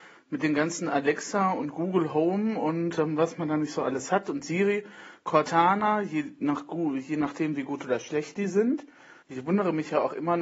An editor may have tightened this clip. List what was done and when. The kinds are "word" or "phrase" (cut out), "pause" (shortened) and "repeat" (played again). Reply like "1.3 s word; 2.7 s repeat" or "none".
9.2 s pause